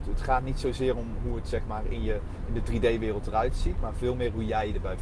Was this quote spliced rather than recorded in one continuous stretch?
no; 0 cuts

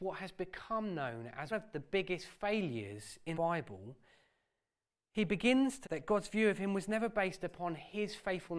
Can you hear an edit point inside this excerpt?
yes; 3 cuts; at 1.5 s, 3.3 s, 5.8 s

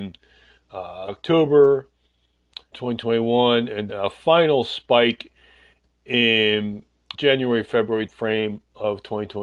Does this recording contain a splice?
yes; 5 cuts; at 1.1 s, 2.7 s, 3.9 s, 7.1 s, 8.1 s

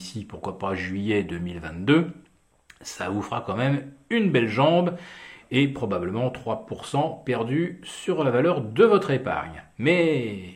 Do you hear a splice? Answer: no; 0 cuts

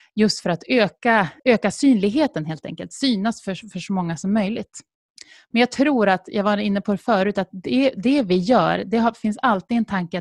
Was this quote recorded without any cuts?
no; 2 cuts; at 1.4 s, 4.9 s

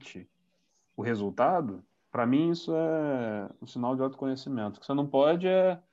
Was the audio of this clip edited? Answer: yes; 1 cut; at 1.9 s

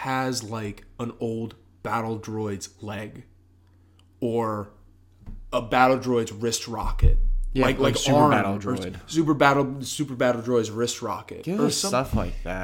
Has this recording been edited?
no; 0 cuts

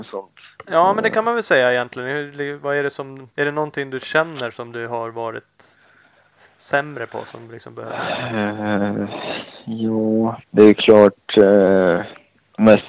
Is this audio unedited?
no; 2 cuts; at 3.3 s, 10.4 s

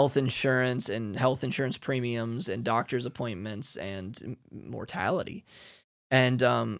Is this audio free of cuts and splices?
yes; 0 cuts

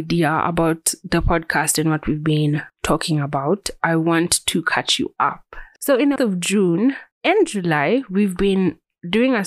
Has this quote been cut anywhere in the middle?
yes; 3 cuts; at 2.7 s, 6.2 s, 7.1 s

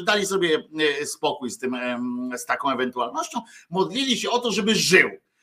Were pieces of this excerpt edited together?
no; 0 cuts

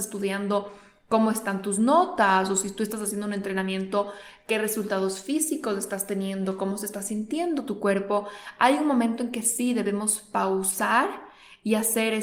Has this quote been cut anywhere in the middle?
no; 0 cuts

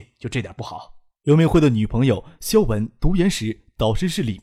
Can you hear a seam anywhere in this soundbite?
yes; 1 cut; at 1.1 s

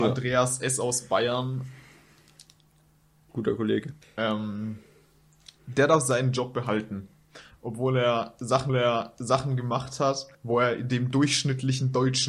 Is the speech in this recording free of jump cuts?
no; 3 cuts; at 4.0 s, 8.7 s, 10.3 s

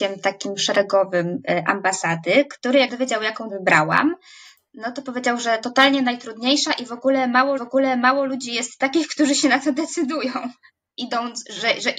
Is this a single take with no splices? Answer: no; 3 cuts; at 2.9 s, 3.5 s, 7.6 s

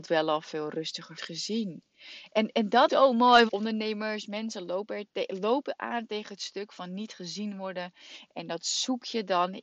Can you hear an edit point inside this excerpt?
yes; 3 cuts; at 1.2 s, 2.9 s, 3.5 s

